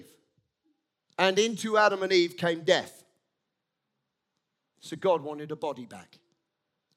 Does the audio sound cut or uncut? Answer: uncut